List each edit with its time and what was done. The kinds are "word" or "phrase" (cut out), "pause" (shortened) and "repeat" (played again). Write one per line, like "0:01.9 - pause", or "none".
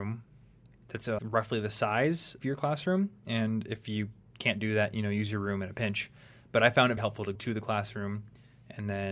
0:01.2 - word
0:02.4 - word
0:07.0 - word
0:07.4 - word